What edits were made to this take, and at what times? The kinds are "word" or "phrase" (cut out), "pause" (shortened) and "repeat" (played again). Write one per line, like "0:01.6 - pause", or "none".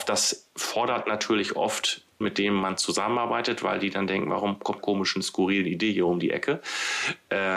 0:02.2 - word
0:04.8 - phrase